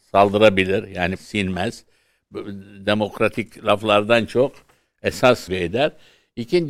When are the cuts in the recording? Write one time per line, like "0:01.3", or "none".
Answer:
0:01.2
0:05.5